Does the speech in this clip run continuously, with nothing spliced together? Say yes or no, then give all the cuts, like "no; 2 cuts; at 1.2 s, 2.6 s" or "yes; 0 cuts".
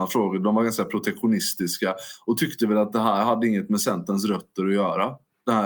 yes; 0 cuts